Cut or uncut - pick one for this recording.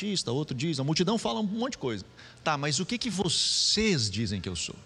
uncut